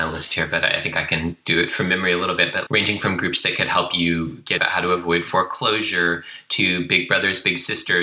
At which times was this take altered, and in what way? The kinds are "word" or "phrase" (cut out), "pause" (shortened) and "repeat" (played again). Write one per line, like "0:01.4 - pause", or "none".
0:02.7 - word
0:04.6 - word